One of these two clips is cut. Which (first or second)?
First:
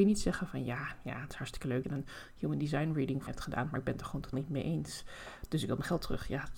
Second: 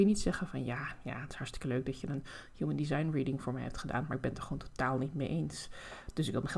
first